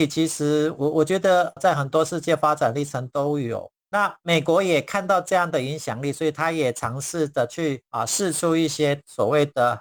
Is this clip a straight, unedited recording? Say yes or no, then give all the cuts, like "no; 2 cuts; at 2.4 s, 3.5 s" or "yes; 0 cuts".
no; 2 cuts; at 3.8 s, 7.9 s